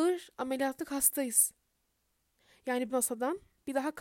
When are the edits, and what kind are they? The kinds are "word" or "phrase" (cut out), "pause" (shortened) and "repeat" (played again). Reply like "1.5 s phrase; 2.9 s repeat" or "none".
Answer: 2.9 s word